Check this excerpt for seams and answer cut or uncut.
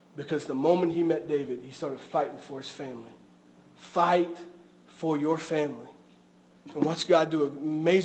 uncut